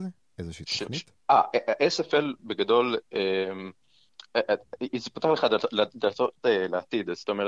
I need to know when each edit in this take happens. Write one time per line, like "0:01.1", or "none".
0:01.2